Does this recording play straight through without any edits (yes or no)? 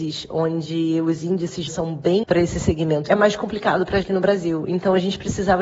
no